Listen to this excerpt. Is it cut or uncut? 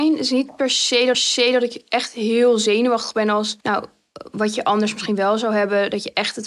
cut